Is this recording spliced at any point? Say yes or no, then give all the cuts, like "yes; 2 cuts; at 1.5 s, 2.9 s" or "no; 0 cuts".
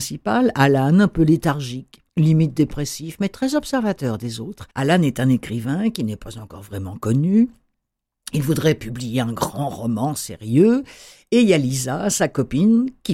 yes; 2 cuts; at 2.1 s, 4.7 s